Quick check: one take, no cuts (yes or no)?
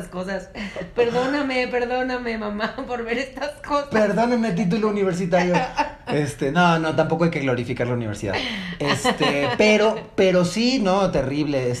yes